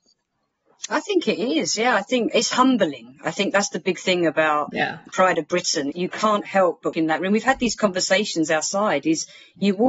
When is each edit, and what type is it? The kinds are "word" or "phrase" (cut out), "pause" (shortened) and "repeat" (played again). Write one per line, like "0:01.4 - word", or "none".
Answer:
0:05.1 - word
0:05.9 - word
0:06.9 - word